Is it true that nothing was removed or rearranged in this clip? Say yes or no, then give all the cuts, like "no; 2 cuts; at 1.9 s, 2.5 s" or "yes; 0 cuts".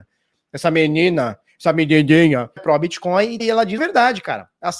no; 3 cuts; at 2.6 s, 3.4 s, 3.8 s